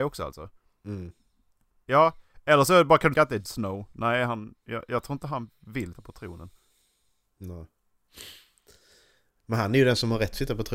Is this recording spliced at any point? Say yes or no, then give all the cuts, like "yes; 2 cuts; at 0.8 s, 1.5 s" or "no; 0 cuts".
yes; 3 cuts; at 3.1 s, 3.4 s, 5.9 s